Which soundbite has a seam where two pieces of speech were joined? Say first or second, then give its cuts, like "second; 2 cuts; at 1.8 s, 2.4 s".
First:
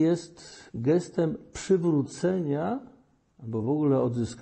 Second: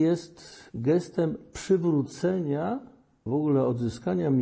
second; 1 cut; at 3.3 s